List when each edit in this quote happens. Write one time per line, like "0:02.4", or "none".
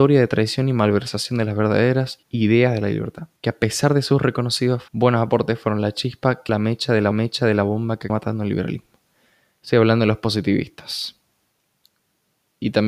0:02.2
0:03.4
0:04.9
0:06.5
0:07.1
0:08.1